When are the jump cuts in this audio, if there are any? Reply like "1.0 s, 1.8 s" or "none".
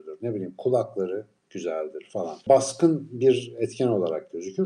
none